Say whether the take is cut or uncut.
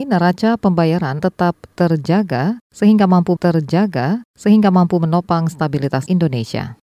cut